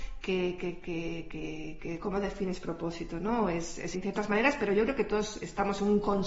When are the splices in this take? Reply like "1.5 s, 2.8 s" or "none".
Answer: 3.9 s